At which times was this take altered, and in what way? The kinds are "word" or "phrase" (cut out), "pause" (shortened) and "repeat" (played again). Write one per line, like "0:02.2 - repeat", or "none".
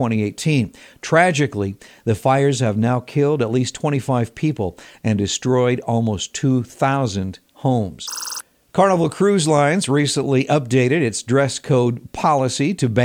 none